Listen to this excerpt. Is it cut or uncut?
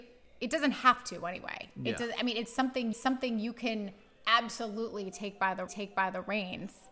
cut